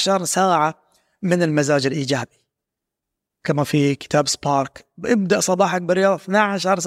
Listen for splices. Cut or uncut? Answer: uncut